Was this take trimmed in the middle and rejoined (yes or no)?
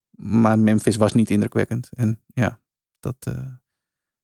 no